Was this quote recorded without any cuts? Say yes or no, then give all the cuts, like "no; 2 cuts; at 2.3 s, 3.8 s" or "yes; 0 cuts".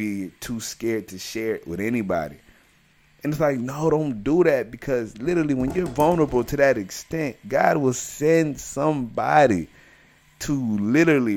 yes; 0 cuts